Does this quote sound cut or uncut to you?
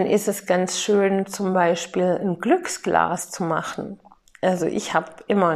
uncut